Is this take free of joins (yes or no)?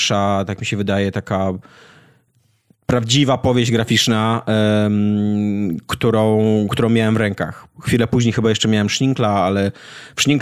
yes